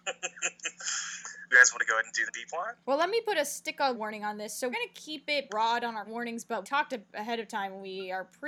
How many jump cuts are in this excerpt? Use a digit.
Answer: 8